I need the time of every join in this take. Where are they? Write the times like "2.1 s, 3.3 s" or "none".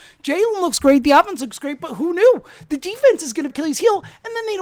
3.5 s